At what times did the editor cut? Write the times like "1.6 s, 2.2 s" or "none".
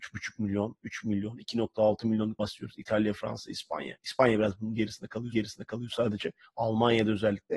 2.4 s, 5.3 s

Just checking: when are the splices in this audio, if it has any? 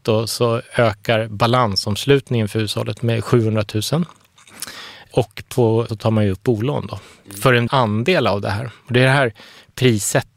5.9 s, 6.4 s, 7.7 s

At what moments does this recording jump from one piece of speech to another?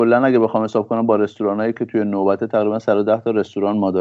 none

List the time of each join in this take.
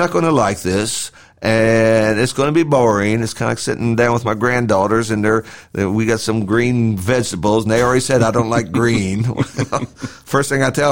none

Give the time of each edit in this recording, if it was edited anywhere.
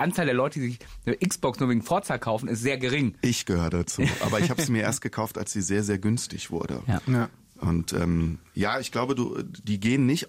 none

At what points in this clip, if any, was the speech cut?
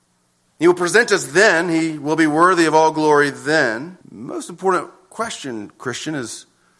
4.0 s

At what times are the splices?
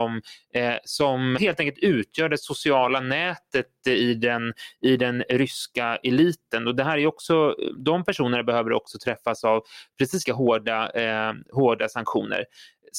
1.4 s, 7.8 s, 10.3 s

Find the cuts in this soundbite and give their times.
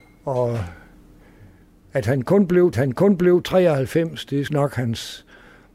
2.7 s, 4.5 s

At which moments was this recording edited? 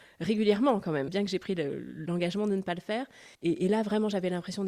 1.1 s, 3.3 s

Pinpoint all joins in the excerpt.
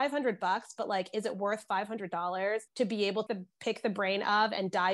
2.7 s, 3.3 s

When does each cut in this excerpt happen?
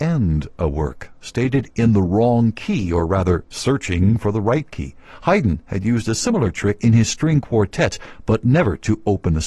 none

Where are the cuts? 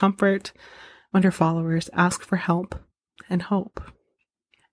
none

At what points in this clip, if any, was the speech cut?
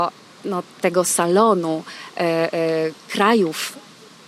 none

